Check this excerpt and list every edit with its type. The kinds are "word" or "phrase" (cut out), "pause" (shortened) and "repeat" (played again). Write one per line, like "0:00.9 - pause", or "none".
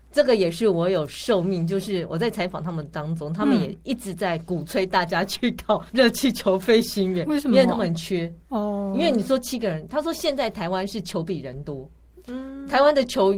0:05.9 - pause